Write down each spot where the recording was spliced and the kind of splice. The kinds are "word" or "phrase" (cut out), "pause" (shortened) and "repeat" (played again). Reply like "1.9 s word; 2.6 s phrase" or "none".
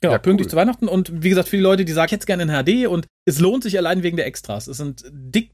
2.1 s phrase